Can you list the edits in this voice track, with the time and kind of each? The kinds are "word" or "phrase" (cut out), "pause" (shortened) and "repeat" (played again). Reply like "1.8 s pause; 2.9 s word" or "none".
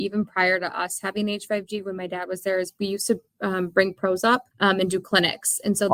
4.5 s pause